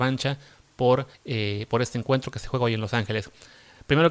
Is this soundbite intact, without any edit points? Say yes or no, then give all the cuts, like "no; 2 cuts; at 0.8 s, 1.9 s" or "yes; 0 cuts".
no; 1 cut; at 1.1 s